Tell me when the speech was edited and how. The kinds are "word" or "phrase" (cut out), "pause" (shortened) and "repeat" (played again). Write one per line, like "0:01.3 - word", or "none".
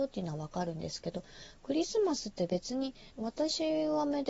0:03.1 - pause